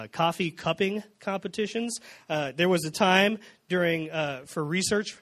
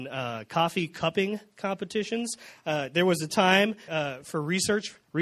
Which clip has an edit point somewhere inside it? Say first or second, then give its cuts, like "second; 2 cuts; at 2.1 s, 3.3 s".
second; 1 cut; at 3.9 s